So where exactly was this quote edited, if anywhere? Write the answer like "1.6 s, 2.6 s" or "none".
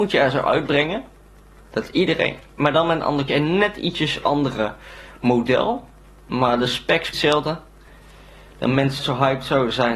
3.3 s, 7.1 s, 9.0 s